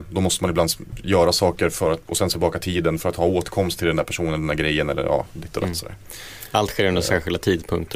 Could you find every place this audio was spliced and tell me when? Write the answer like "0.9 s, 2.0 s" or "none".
2.3 s